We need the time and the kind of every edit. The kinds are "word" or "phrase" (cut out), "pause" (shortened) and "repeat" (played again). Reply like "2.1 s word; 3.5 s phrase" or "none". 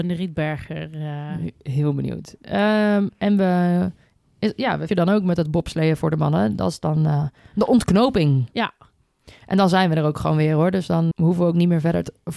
4.9 s word; 11.1 s word